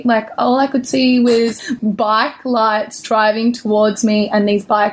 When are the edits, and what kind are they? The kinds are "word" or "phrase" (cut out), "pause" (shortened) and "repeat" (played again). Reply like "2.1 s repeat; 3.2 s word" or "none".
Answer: 1.6 s word